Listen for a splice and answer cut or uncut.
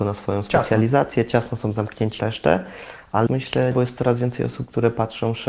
cut